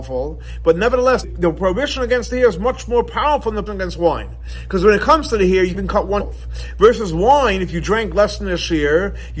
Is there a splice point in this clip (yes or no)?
yes